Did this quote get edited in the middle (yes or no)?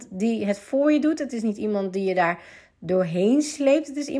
no